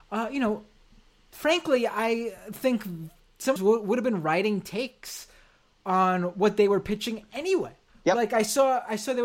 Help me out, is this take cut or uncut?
cut